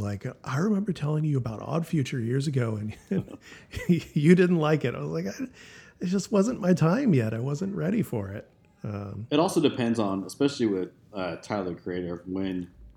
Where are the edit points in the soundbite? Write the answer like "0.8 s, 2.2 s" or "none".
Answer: none